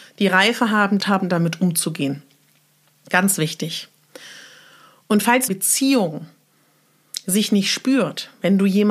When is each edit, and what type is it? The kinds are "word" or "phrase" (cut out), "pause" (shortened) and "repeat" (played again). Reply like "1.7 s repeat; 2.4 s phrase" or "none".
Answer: 1.0 s phrase; 5.5 s phrase